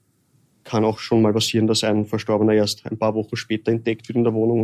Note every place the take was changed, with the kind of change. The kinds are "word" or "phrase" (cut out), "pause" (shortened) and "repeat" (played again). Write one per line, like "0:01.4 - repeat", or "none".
none